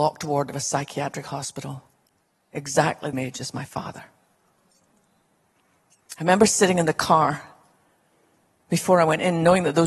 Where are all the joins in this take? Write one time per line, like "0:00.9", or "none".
0:03.1